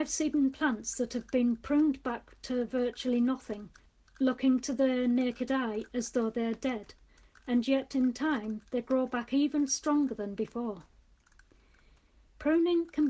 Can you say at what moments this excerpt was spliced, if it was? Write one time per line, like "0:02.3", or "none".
none